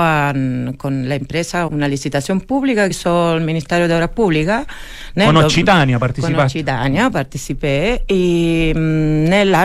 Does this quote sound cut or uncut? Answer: cut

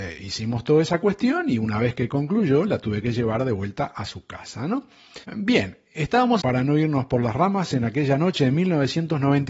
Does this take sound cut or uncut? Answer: cut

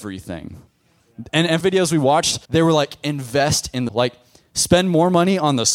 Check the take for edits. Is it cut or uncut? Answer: cut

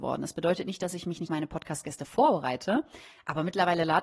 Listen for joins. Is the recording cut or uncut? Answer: cut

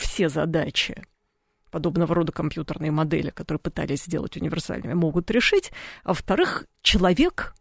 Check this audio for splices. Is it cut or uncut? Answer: uncut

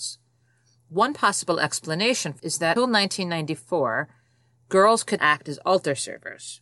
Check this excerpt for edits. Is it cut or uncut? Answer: cut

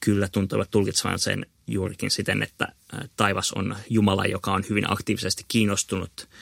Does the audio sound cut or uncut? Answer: uncut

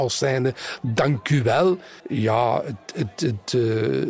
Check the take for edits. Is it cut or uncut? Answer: cut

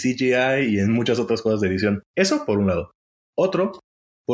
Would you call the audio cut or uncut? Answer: cut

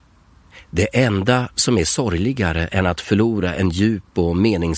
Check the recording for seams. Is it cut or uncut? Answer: uncut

